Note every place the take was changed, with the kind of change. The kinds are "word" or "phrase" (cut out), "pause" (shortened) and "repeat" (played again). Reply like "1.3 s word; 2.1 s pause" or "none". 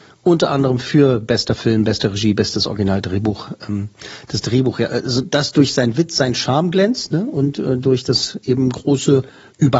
none